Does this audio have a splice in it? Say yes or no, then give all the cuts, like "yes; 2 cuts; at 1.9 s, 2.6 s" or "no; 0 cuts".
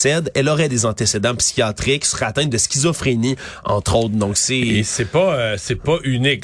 no; 0 cuts